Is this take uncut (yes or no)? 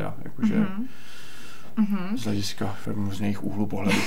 no